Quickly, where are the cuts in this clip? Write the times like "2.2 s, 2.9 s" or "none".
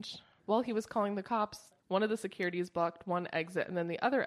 1.8 s